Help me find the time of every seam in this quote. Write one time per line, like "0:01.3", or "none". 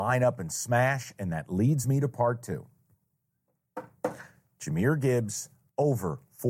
none